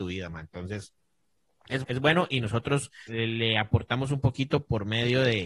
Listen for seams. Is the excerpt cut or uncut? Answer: cut